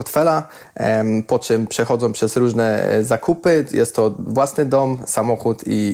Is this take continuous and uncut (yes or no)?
yes